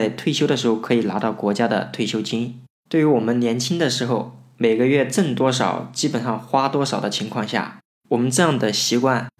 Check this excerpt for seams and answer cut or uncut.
uncut